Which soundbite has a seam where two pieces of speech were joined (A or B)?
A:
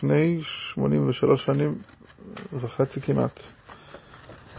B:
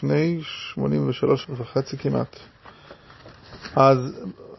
B